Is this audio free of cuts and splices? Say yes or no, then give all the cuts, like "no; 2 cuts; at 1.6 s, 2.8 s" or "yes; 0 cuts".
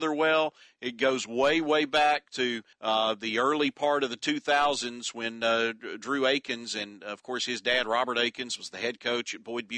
no; 1 cut; at 2.7 s